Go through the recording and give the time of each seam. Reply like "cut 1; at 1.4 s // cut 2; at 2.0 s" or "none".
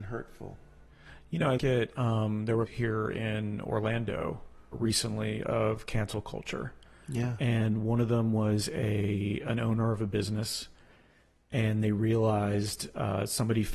cut 1; at 1.6 s // cut 2; at 2.7 s // cut 3; at 4.7 s